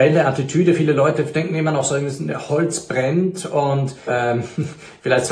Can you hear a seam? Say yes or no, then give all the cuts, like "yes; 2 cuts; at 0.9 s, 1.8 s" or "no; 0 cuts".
yes; 2 cuts; at 2.5 s, 4.1 s